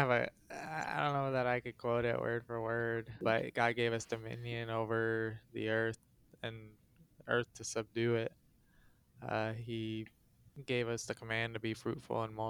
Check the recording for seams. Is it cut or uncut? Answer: cut